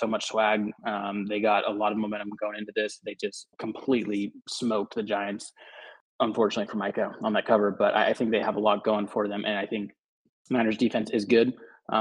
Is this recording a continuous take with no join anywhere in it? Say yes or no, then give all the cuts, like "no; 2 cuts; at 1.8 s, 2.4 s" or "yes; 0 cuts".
no; 1 cut; at 3.5 s